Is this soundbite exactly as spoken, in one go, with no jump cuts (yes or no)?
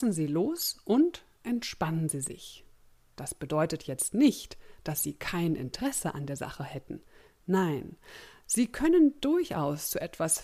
yes